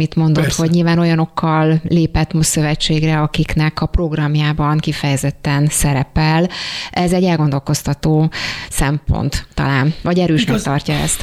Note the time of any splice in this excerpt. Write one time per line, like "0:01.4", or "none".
none

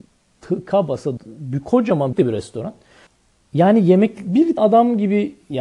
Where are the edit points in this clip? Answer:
0:01.2
0:02.1
0:03.1
0:04.6

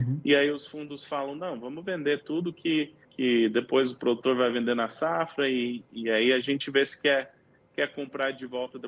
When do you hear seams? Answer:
0:03.0

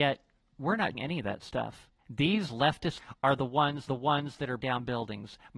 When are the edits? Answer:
0:00.9
0:02.0
0:03.0
0:03.9
0:04.6

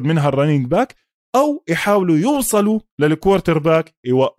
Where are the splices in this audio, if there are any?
none

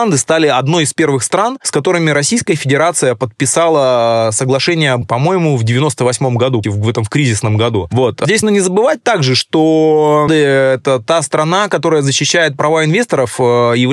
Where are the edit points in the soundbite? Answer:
0:05.0
0:06.6
0:08.4
0:10.3

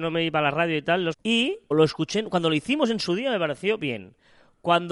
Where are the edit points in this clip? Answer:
0:01.1
0:01.7

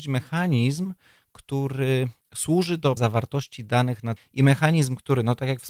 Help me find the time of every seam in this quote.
0:02.2
0:03.0
0:04.2

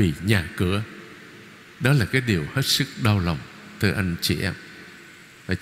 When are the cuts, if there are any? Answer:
none

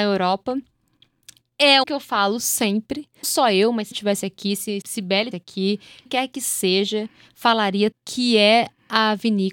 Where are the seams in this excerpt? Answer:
0:01.8
0:03.2
0:03.9
0:04.8
0:05.3
0:06.1
0:07.9

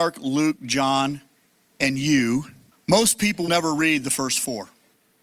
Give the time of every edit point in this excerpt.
0:02.7
0:03.5

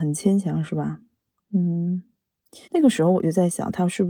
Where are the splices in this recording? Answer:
0:02.6

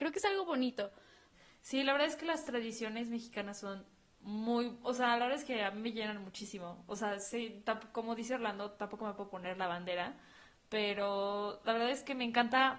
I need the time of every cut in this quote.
none

